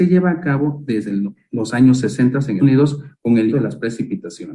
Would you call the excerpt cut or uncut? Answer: cut